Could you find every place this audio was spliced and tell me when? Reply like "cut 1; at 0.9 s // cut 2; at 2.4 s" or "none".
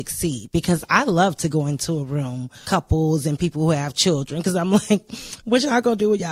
cut 1; at 2.6 s